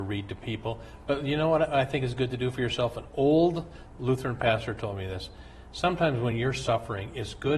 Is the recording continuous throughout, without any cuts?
yes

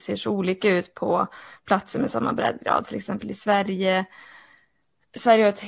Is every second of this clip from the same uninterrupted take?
yes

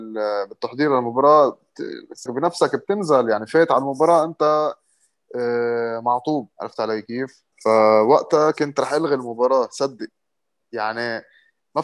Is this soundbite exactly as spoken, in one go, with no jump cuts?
no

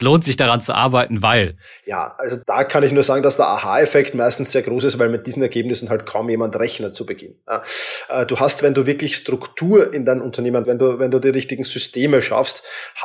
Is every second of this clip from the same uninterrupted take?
no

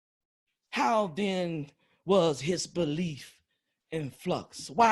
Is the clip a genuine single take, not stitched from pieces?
yes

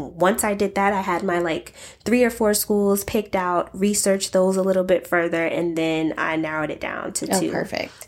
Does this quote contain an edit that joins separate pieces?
no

